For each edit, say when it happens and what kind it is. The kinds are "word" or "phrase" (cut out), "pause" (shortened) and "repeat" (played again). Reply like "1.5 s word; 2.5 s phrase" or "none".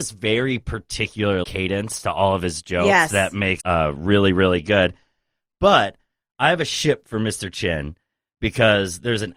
1.4 s word; 3.6 s word